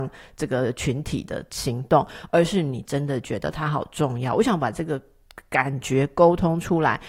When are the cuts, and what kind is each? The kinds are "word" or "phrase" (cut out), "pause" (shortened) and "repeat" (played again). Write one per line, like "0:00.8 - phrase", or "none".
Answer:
none